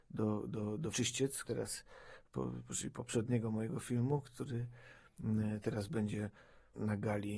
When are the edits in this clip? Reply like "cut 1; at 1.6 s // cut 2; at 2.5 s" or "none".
cut 1; at 0.9 s // cut 2; at 1.4 s